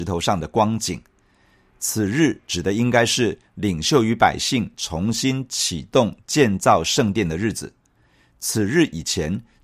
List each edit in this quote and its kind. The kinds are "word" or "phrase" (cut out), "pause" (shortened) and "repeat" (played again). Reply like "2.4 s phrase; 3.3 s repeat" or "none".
none